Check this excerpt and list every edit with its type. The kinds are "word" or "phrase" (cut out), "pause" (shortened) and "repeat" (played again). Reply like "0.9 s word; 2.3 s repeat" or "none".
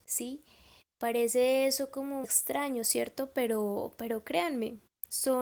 2.2 s word